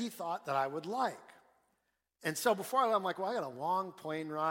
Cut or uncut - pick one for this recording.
uncut